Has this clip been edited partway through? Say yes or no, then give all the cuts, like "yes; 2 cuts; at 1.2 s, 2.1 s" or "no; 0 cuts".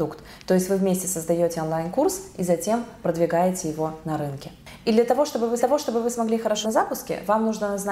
yes; 2 cuts; at 5.6 s, 6.6 s